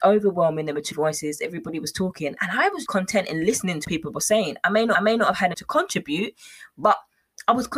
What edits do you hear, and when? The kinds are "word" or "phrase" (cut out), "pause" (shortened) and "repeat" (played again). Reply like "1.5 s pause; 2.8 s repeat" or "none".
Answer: 0.9 s word; 2.9 s word; 3.8 s word; 4.9 s repeat; 5.5 s word